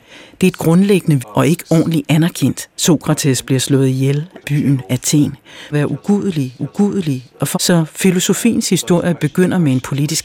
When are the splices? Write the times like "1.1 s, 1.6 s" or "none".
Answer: 1.2 s, 2.7 s, 4.4 s, 5.7 s, 6.6 s, 7.5 s